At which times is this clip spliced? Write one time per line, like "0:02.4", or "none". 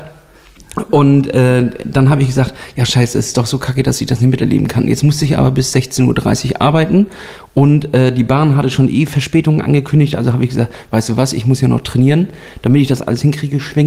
none